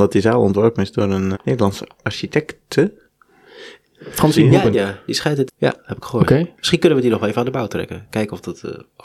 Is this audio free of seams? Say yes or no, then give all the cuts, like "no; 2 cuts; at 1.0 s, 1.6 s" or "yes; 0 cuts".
no; 3 cuts; at 1.3 s, 4.7 s, 5.5 s